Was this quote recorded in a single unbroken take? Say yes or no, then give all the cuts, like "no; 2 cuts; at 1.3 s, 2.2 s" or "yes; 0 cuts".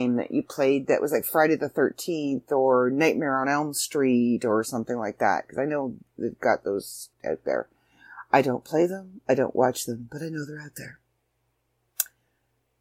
no; 1 cut; at 7.1 s